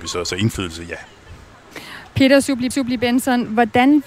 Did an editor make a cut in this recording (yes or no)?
yes